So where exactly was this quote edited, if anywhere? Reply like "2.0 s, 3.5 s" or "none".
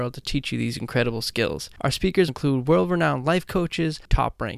2.3 s